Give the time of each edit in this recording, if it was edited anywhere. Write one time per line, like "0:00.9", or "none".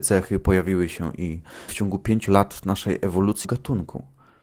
0:01.7
0:02.3
0:03.4

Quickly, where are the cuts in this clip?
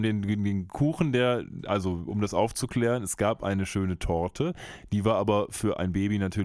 none

